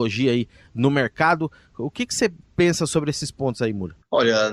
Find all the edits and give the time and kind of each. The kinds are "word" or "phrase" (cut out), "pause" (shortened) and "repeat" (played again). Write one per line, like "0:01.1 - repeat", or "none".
none